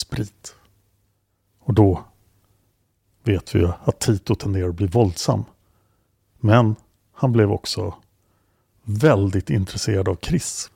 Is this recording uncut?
yes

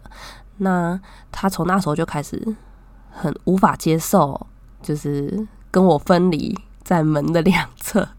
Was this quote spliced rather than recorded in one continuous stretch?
no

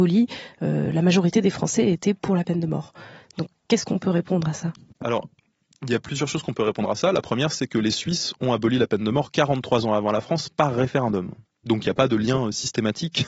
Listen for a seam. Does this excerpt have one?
no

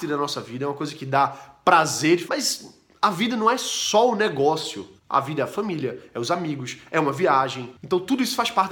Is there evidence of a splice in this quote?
yes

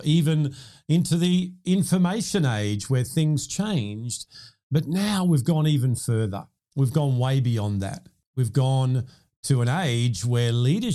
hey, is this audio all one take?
yes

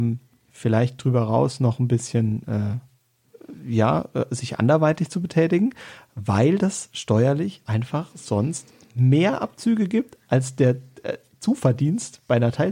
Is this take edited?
no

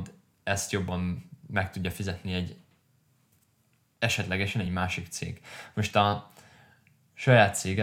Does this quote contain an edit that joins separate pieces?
no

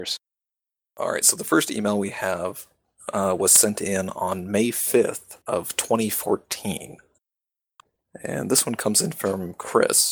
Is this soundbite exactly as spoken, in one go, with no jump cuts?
no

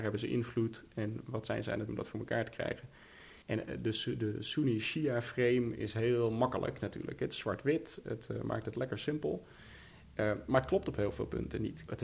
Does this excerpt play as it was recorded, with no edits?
no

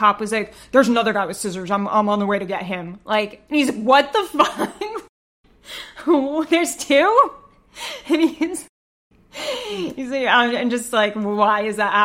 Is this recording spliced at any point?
no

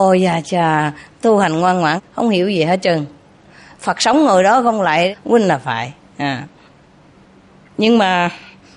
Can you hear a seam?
no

